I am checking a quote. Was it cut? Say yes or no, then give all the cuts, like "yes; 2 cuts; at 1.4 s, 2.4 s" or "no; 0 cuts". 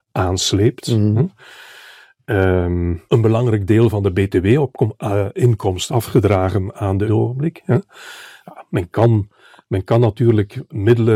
yes; 4 cuts; at 3.1 s, 5.9 s, 6.7 s, 7.1 s